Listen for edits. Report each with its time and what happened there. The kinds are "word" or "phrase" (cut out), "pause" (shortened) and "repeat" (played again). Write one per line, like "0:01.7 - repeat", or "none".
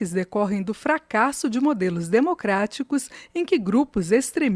none